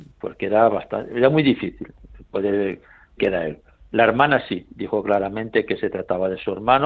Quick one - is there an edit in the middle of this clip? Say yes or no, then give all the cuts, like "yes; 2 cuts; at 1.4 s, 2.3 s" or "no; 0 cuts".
yes; 1 cut; at 3.2 s